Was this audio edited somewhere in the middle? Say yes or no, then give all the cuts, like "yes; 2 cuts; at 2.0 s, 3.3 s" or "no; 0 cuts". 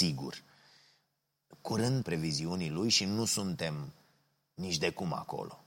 yes; 1 cut; at 2.0 s